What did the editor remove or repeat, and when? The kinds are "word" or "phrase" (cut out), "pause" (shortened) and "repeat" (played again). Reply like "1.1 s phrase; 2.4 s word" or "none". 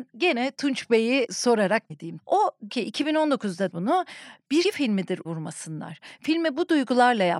1.9 s word; 2.7 s word; 3.7 s word; 4.6 s word; 5.3 s word